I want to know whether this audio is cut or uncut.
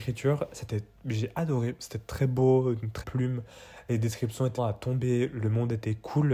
cut